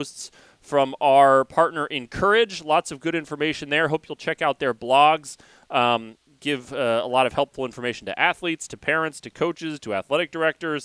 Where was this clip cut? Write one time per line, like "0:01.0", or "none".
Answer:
none